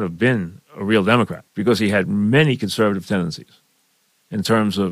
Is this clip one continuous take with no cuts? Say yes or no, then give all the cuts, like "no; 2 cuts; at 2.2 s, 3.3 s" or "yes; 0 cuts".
no; 1 cut; at 1.5 s